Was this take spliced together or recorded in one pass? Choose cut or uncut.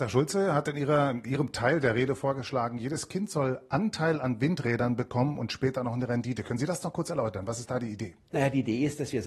uncut